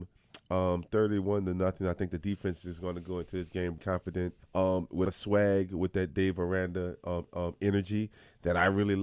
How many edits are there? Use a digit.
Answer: 4